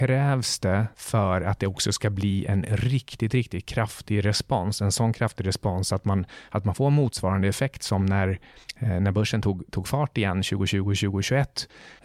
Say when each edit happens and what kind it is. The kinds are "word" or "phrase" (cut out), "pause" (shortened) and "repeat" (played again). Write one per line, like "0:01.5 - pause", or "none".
none